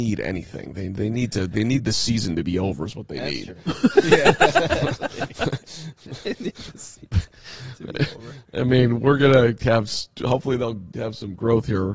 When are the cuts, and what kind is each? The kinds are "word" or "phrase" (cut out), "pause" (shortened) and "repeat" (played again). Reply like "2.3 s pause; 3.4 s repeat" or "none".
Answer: 1.5 s word